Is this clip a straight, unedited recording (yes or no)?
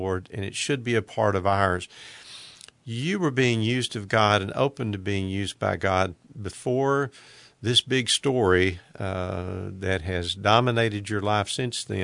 yes